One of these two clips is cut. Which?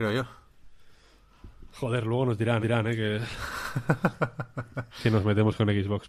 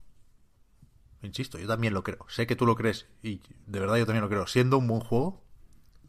first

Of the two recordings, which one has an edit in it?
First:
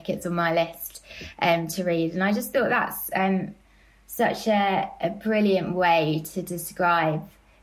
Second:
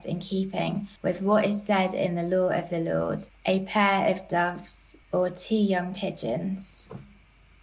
second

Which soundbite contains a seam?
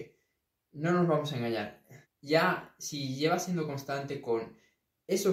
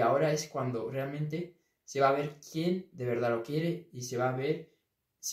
first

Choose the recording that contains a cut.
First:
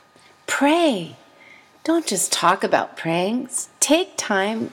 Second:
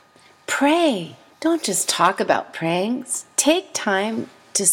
second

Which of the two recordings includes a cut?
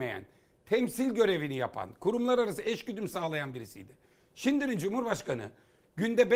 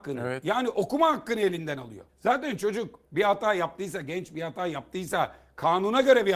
second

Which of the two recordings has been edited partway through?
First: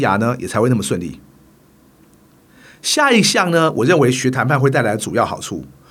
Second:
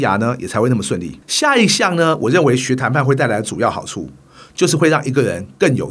second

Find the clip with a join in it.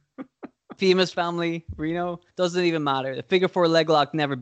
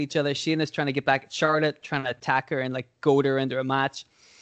first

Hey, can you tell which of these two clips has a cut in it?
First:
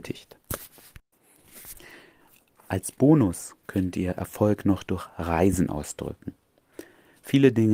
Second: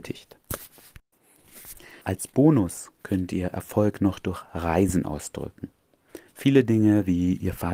second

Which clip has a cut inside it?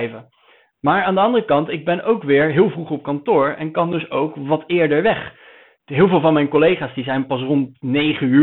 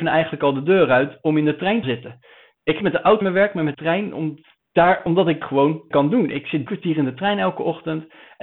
second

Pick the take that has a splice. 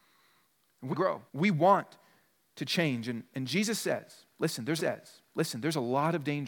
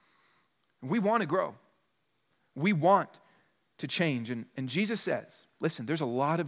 first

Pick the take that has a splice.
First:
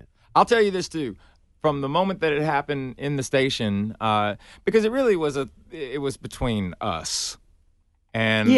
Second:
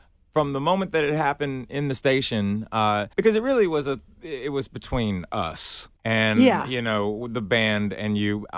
second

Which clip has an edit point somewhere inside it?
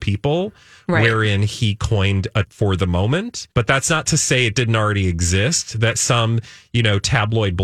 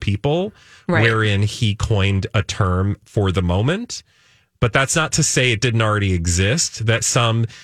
first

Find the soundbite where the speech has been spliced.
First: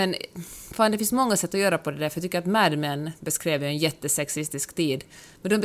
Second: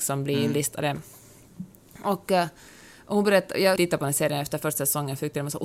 second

